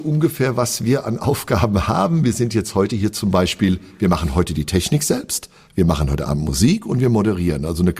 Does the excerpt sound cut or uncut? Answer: uncut